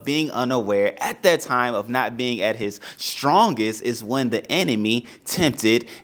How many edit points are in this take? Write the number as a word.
zero